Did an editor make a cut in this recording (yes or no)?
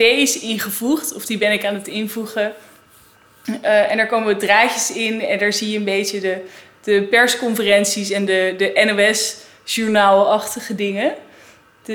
no